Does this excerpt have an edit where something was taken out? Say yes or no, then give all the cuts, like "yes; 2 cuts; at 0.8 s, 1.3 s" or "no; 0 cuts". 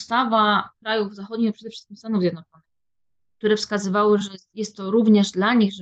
no; 0 cuts